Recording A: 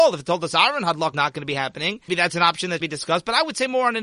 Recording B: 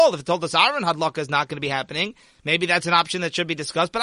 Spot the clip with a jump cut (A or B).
A